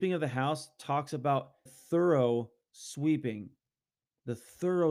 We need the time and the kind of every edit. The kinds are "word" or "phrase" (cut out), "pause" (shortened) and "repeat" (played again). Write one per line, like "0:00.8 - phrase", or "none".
0:01.7 - word